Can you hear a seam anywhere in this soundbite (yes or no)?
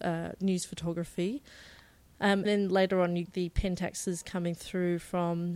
yes